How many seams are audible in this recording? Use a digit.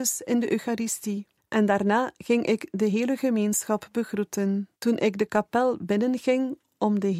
2